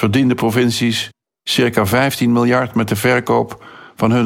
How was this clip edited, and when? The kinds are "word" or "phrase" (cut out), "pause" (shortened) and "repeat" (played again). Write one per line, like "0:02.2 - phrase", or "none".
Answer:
none